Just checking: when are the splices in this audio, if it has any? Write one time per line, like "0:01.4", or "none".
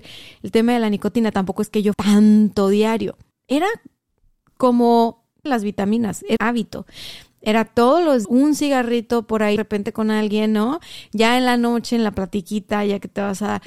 0:01.9
0:03.3
0:05.5
0:06.4
0:08.2
0:09.6